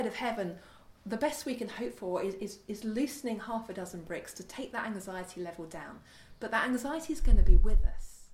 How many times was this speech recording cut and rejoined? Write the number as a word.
one